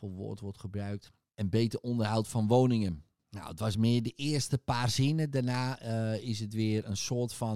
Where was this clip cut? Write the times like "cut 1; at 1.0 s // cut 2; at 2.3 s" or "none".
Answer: none